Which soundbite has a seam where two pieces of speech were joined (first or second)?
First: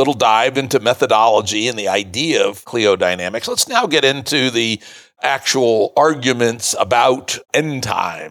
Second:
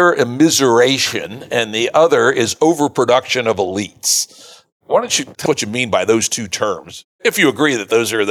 second